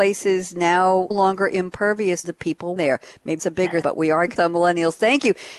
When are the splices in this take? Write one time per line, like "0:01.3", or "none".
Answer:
0:01.1
0:02.2
0:02.8
0:03.4
0:03.8
0:04.4